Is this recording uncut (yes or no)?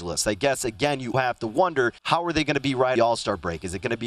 no